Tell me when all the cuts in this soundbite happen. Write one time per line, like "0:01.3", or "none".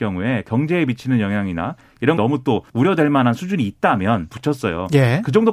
0:02.2
0:02.7
0:04.3